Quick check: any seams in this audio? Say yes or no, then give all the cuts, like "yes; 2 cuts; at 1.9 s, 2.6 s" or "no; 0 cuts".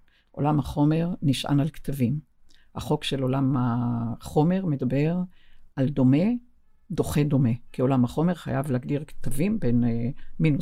no; 0 cuts